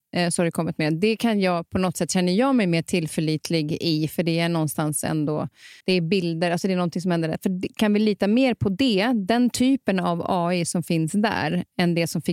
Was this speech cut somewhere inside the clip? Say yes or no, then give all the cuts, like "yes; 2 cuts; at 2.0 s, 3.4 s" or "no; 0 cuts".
yes; 1 cut; at 5.8 s